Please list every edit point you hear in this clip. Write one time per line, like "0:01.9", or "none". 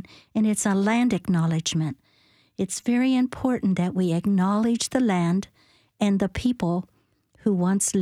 none